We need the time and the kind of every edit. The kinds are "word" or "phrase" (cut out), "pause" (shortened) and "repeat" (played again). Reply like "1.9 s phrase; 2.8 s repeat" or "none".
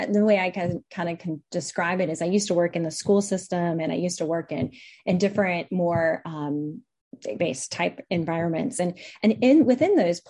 7.4 s word